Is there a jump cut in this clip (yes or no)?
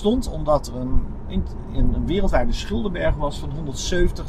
no